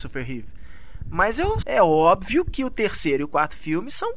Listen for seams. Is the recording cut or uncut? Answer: cut